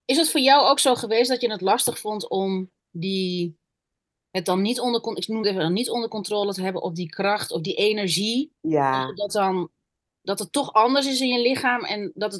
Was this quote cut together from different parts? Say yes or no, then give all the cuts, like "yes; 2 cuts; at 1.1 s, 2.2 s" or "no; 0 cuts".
no; 0 cuts